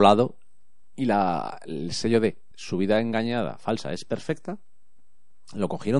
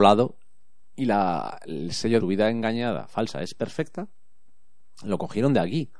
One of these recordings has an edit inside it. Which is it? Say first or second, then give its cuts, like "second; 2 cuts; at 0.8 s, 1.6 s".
second; 1 cut; at 2.2 s